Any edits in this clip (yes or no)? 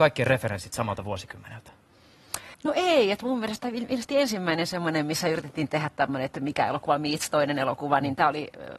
yes